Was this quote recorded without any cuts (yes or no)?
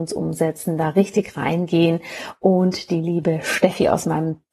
yes